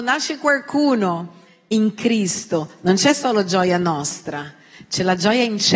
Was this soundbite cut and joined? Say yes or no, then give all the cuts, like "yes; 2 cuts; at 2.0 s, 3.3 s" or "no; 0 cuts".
no; 0 cuts